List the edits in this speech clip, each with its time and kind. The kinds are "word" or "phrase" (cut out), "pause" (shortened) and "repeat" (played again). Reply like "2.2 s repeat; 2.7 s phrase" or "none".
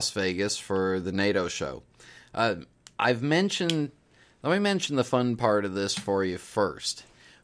none